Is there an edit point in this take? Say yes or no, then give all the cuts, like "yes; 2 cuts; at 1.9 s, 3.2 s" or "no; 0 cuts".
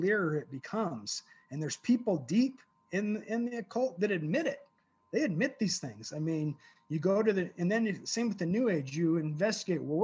no; 0 cuts